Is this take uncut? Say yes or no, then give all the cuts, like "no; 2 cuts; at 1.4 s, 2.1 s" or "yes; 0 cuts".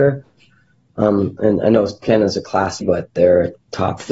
no; 2 cuts; at 2.0 s, 2.8 s